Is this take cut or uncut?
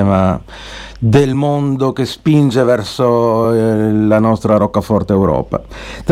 uncut